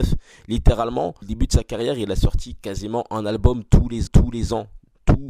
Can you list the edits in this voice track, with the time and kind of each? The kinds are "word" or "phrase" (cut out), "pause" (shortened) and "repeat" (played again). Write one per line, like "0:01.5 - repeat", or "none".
0:01.2 - word
0:04.1 - repeat